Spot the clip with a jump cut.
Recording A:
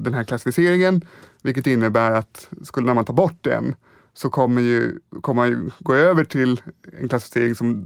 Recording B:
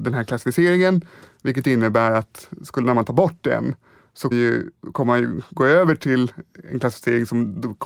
B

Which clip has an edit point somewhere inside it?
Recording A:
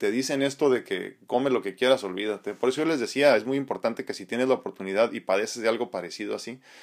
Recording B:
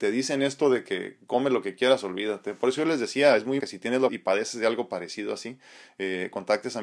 B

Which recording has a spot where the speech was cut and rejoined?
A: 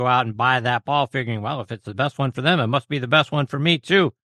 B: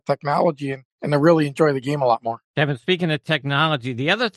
B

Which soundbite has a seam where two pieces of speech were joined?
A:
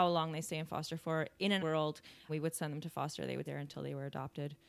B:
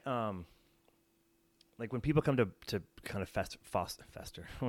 A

